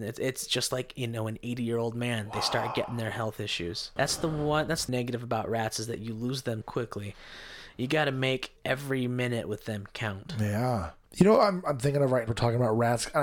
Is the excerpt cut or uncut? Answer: cut